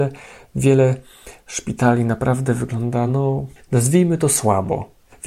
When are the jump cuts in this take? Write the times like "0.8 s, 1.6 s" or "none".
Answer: none

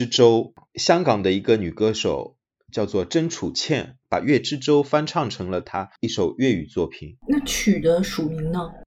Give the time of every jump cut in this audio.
none

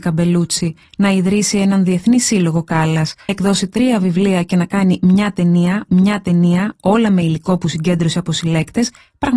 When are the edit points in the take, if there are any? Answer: 3.3 s, 5.9 s

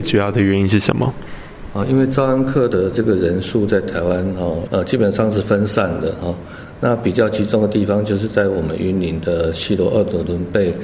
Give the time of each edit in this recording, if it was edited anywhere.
4.7 s

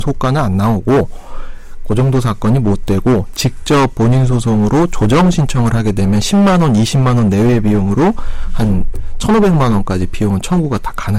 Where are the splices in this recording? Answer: none

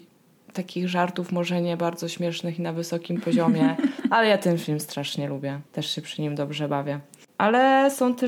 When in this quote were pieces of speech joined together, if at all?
5.7 s

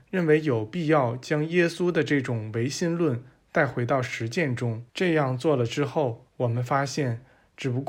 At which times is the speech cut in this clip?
4.9 s, 6.3 s

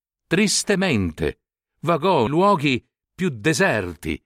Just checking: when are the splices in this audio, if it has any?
2.3 s

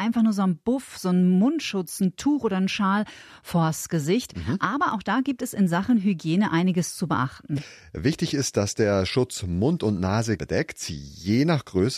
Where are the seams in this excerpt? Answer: 10.4 s

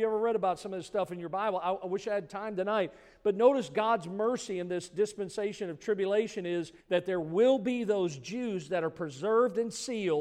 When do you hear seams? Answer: 6.8 s

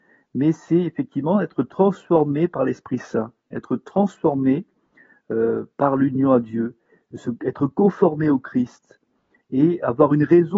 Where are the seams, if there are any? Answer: none

